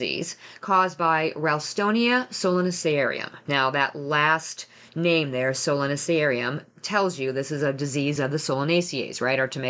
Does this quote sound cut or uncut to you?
uncut